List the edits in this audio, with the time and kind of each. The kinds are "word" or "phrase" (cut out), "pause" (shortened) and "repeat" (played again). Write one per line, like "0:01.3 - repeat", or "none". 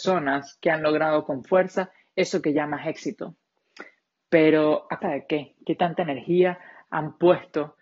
0:05.0 - word